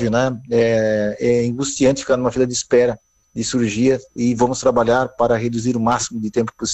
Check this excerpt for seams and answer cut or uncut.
uncut